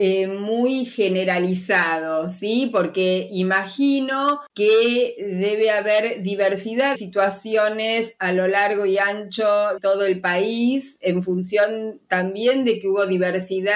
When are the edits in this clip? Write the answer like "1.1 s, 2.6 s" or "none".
4.5 s, 6.9 s, 9.8 s

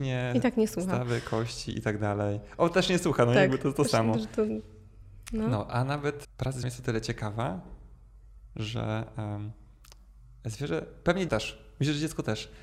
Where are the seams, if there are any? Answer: 6.2 s, 6.6 s, 11.3 s

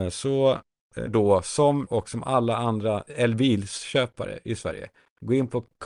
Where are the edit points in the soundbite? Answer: 1.1 s, 1.9 s, 3.1 s

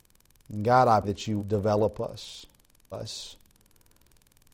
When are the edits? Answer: 1.0 s, 1.4 s, 2.9 s

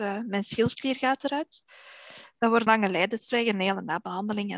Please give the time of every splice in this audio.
2.7 s

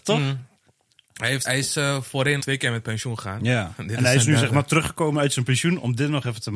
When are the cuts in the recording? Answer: 1.4 s, 2.4 s

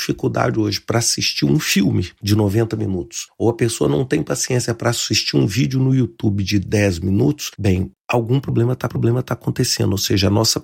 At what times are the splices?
7.5 s, 8.9 s

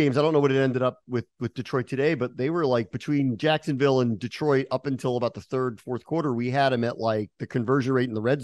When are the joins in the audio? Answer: none

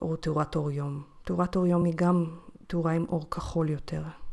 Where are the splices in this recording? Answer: none

